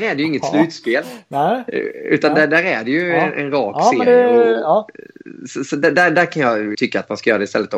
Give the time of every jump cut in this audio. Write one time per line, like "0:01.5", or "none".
0:06.7